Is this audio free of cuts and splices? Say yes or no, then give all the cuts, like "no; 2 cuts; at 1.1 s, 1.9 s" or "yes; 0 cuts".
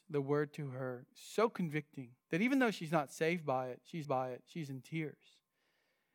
no; 2 cuts; at 2.2 s, 4.0 s